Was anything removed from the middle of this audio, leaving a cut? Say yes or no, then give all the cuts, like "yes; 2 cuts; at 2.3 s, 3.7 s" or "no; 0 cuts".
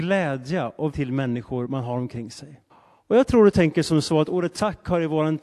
yes; 2 cuts; at 0.9 s, 2.7 s